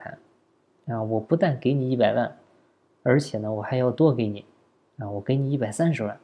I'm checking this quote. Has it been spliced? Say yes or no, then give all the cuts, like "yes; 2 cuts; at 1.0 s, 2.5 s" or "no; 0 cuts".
no; 0 cuts